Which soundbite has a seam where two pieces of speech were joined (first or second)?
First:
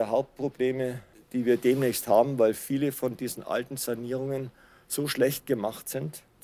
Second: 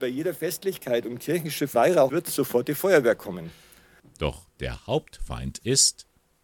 second